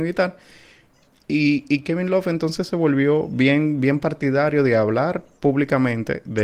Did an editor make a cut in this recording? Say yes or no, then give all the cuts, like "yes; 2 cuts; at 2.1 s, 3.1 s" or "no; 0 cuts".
no; 0 cuts